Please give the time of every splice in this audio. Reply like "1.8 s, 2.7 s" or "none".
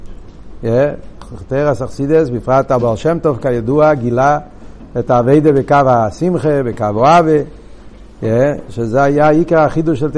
none